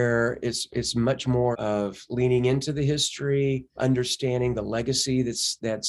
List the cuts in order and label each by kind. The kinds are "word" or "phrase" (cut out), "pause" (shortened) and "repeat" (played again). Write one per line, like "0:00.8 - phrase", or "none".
0:01.5 - word
0:03.8 - word